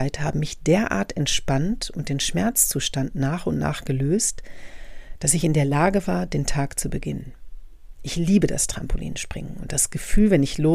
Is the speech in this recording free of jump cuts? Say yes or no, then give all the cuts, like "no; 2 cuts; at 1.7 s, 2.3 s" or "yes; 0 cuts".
yes; 0 cuts